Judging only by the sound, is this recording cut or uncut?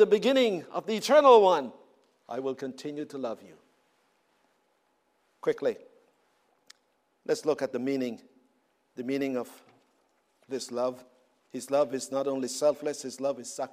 uncut